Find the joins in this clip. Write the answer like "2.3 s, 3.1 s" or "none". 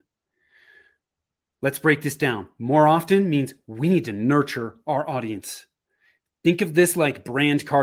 none